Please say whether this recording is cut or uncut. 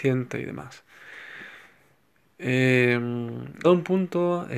cut